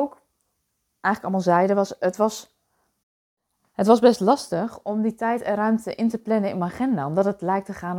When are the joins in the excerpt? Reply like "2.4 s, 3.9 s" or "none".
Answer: none